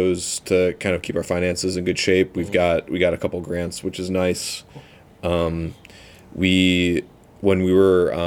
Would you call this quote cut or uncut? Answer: uncut